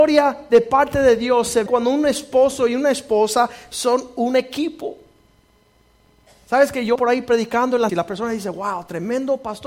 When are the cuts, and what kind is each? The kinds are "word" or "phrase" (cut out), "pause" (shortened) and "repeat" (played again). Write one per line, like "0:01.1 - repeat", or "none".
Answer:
0:01.7 - word
0:07.0 - word
0:07.9 - word